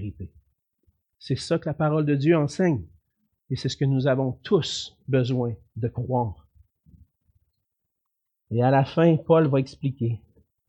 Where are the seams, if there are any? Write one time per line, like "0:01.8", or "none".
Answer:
none